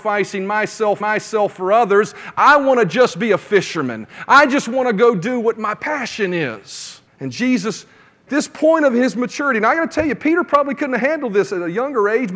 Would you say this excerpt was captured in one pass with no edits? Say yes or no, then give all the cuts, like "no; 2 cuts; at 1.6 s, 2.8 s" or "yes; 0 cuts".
no; 3 cuts; at 1.0 s, 7.1 s, 8.3 s